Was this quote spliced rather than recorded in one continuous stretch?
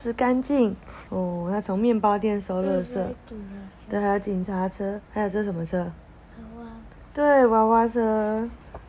yes; 2 cuts; at 1.1 s, 5.0 s

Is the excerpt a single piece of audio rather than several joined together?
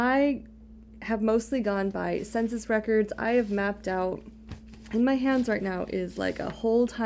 yes; 0 cuts

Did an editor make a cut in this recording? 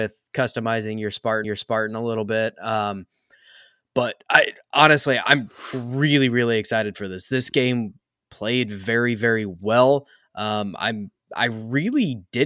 yes; 1 cut; at 1.4 s

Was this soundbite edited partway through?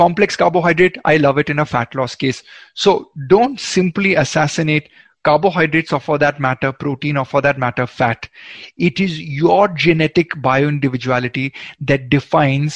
no; 0 cuts

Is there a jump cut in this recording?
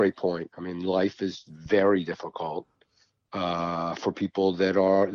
no; 0 cuts

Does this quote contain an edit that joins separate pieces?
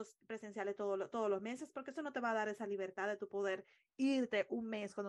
no; 0 cuts

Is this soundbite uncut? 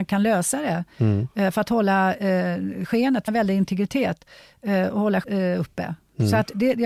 no; 2 cuts; at 3.3 s, 5.2 s

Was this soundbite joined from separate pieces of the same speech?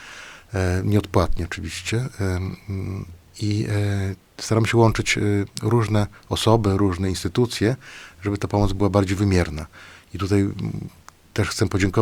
no; 0 cuts

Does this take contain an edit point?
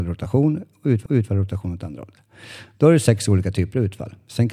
yes; 1 cut; at 1.1 s

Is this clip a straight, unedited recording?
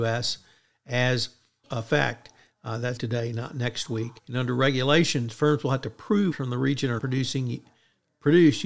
no; 5 cuts; at 1.6 s, 3.0 s, 4.2 s, 6.3 s, 7.0 s

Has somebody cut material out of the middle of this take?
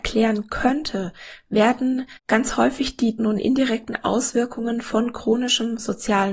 yes; 2 cuts; at 2.2 s, 3.2 s

